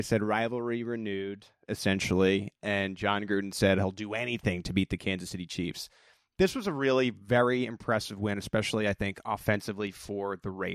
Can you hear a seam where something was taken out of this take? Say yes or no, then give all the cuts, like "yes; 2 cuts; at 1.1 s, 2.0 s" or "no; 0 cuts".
no; 0 cuts